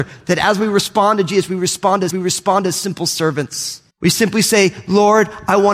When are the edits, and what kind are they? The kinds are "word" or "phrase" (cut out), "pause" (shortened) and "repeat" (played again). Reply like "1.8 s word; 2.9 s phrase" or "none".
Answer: 2.1 s repeat; 3.9 s pause